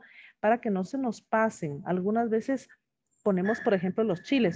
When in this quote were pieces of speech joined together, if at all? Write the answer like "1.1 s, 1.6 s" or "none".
none